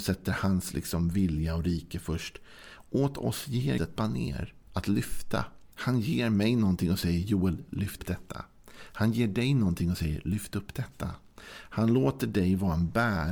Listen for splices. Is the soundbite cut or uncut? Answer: cut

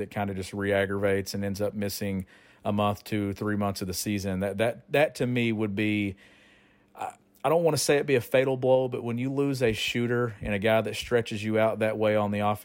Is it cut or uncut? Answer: uncut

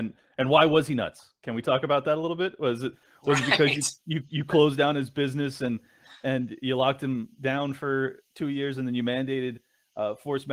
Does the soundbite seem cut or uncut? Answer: uncut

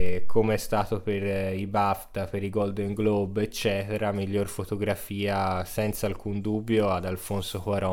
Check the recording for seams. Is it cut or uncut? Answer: uncut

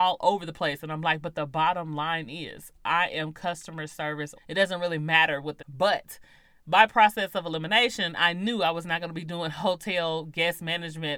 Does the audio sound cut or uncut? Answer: cut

